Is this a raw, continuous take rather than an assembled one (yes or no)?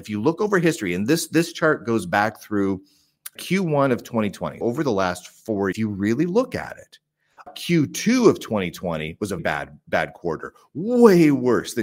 no